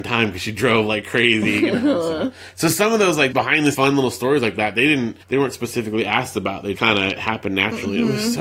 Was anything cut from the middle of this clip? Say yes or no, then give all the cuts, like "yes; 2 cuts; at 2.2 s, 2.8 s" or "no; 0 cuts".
yes; 4 cuts; at 3.3 s, 3.7 s, 5.2 s, 6.7 s